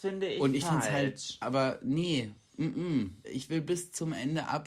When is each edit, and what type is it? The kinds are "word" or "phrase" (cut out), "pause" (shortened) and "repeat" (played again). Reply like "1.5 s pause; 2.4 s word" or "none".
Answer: 1.4 s word; 3.2 s word